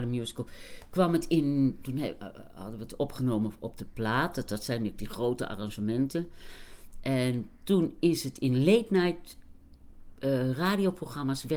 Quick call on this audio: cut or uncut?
uncut